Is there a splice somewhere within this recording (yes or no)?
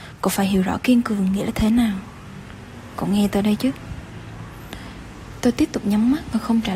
no